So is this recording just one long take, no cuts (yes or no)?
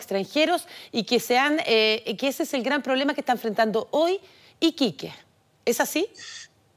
yes